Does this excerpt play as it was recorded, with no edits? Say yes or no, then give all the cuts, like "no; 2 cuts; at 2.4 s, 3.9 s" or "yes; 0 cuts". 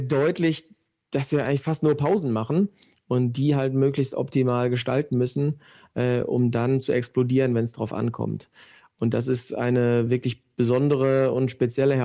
yes; 0 cuts